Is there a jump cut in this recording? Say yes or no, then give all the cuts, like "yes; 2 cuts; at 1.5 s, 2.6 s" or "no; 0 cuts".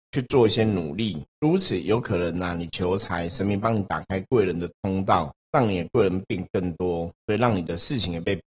yes; 3 cuts; at 1.3 s, 5.4 s, 7.1 s